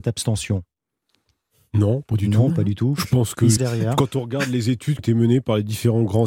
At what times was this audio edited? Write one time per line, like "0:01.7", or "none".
0:03.6
0:05.0